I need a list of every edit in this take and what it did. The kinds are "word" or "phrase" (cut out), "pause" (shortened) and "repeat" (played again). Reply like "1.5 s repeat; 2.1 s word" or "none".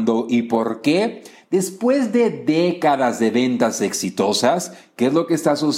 none